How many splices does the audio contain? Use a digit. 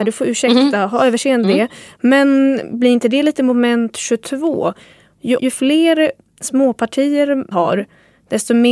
3